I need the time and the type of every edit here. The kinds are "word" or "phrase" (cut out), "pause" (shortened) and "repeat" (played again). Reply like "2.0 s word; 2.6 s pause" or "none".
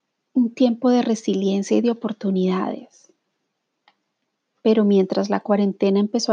none